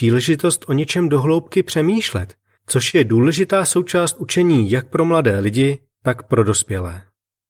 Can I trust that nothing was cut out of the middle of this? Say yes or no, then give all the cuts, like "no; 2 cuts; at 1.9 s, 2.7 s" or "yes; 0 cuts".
yes; 0 cuts